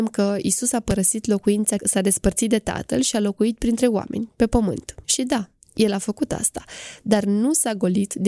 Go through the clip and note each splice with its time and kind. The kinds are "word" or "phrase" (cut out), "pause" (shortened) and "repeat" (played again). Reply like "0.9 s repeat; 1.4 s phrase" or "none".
1.8 s word; 5.0 s pause